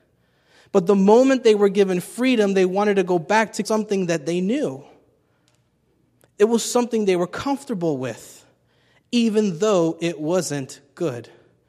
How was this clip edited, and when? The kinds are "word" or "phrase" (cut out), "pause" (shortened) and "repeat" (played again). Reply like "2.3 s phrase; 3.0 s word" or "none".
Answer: 3.6 s phrase